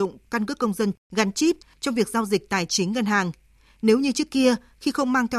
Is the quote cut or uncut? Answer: uncut